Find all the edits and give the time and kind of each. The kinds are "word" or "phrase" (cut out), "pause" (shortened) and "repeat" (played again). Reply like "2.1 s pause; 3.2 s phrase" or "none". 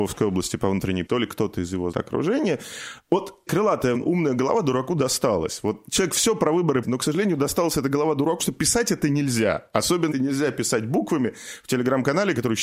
1.1 s word; 1.9 s word; 3.5 s word; 3.9 s word; 6.8 s word; 8.4 s word; 10.1 s word